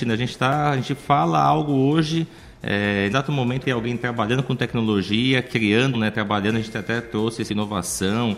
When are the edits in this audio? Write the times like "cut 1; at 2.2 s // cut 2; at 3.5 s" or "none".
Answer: cut 1; at 3.1 s // cut 2; at 3.6 s // cut 3; at 5.9 s // cut 4; at 7.5 s